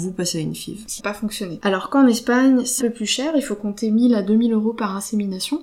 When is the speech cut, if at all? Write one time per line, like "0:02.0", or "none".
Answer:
0:01.0
0:02.8

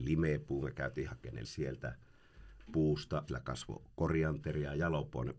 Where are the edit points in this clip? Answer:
0:01.4
0:03.3

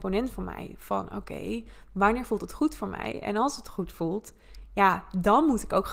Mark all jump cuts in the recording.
none

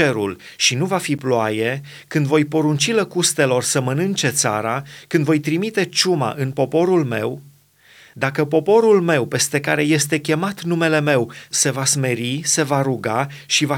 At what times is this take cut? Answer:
none

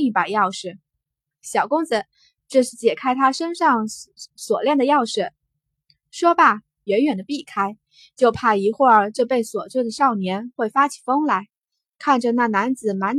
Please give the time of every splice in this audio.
none

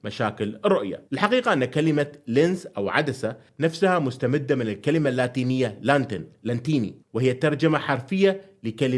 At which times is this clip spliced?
0:01.1

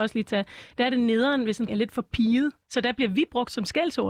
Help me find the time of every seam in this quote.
0:01.7
0:02.6

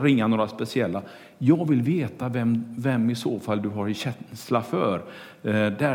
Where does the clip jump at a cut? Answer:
none

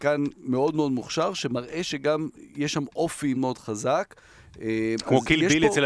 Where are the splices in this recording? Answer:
0:03.3

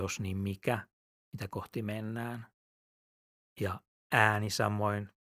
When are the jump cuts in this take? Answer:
none

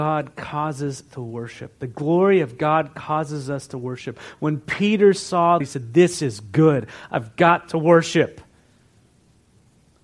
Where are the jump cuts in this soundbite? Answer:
0:01.1
0:05.6

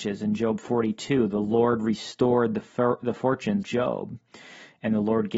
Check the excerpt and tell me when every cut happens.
0:03.6

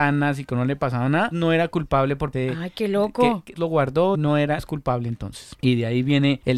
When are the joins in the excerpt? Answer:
0:01.3
0:02.3
0:03.5
0:04.1
0:04.6

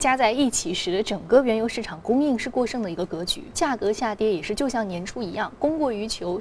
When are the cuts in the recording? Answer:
0:03.5

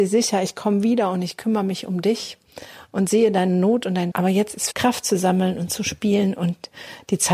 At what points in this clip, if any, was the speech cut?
0:04.1
0:04.7

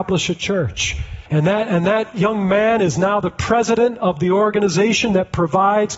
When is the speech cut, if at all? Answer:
0:01.3

